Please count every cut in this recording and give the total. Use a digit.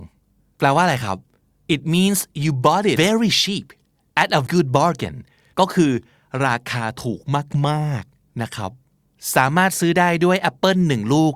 2